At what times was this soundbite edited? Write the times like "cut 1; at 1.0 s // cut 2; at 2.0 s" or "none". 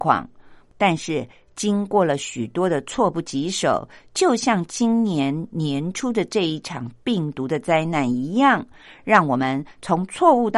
none